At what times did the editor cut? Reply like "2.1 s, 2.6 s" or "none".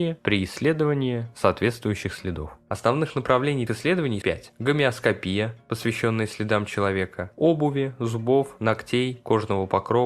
3.7 s, 4.2 s

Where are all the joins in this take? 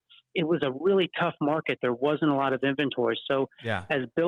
none

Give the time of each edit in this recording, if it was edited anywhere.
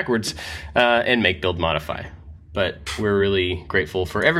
none

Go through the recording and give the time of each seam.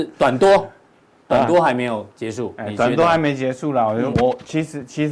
2.1 s, 4.1 s

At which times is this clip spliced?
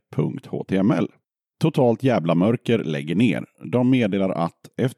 none

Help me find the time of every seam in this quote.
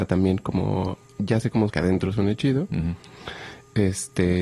1.7 s

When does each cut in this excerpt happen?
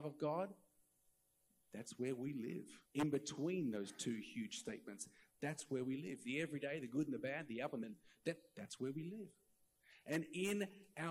2.9 s, 7.8 s

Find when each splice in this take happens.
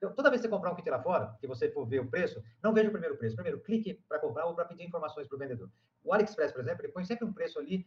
none

